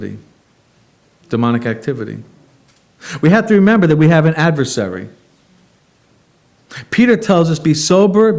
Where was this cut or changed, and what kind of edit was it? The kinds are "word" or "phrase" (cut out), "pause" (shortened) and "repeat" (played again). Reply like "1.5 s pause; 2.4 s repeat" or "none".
none